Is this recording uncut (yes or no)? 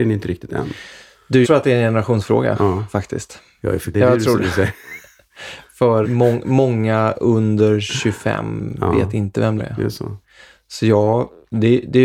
no